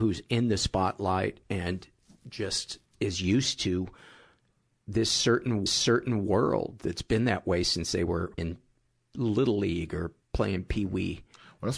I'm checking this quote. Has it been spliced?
yes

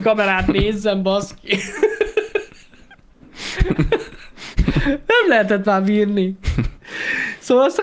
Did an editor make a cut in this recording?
no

